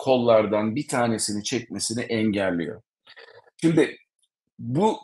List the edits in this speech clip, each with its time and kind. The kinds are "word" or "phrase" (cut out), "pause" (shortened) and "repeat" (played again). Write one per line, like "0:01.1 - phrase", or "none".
none